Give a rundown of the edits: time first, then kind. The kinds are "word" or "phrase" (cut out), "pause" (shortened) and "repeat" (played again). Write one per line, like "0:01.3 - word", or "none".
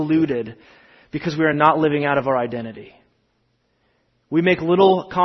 none